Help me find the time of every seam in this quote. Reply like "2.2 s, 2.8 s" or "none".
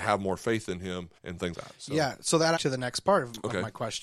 1.2 s, 1.5 s, 2.6 s